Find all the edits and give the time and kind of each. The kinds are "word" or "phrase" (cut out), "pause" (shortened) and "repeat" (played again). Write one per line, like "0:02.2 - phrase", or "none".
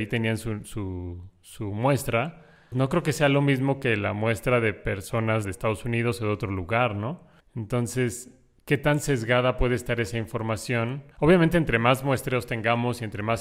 0:02.7 - word
0:05.4 - phrase
0:07.4 - pause
0:11.1 - pause